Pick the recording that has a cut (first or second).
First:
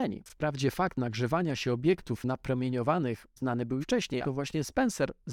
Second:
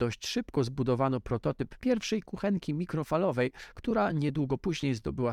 first